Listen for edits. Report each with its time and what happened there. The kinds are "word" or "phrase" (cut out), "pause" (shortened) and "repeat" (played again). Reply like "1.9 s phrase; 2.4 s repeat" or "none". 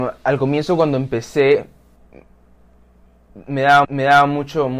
3.8 s repeat